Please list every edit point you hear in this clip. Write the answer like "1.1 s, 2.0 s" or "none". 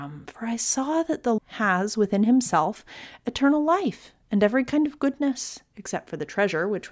1.4 s